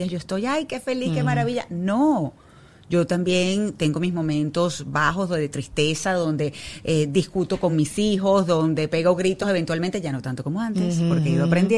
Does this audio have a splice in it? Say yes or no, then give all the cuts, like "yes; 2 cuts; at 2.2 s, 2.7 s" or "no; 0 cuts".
no; 0 cuts